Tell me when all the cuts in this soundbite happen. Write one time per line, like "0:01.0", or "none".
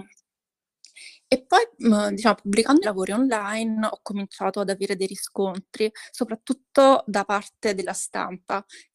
0:02.8

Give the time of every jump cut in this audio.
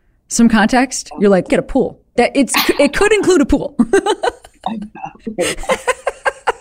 0:01.5
0:02.2

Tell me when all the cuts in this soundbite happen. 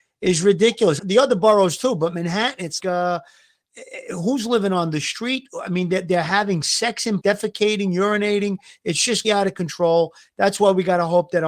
0:01.0
0:02.8
0:07.2
0:09.2

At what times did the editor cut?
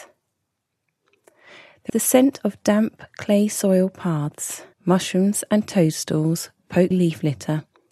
0:01.9
0:04.7
0:06.9

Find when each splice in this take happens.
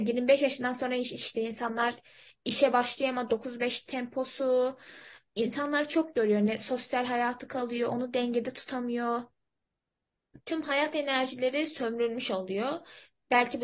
none

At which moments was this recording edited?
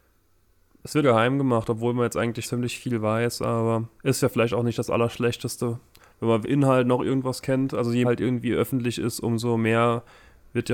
0:01.0
0:02.4
0:04.0
0:06.4
0:08.0

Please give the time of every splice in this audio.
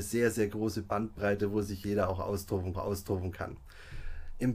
0:02.7

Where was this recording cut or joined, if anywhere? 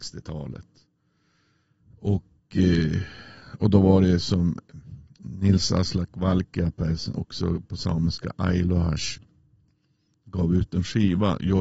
none

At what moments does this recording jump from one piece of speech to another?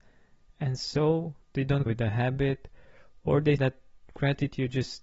0:01.9
0:03.6

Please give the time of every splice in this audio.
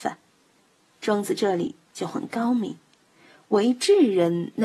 none

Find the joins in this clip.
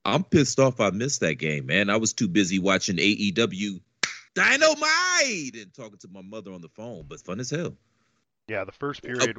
0:04.3
0:07.2

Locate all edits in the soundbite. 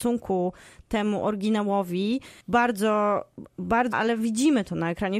0:02.4
0:03.9

